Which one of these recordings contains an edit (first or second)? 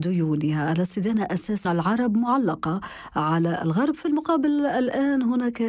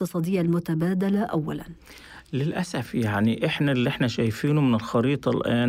first